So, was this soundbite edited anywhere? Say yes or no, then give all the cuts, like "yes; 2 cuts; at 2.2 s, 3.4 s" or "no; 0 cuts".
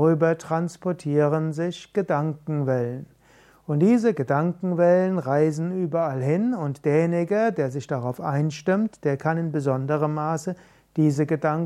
no; 0 cuts